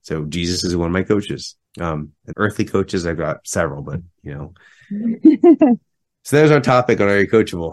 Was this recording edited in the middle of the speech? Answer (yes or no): yes